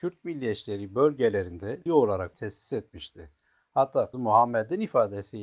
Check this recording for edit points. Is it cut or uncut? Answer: cut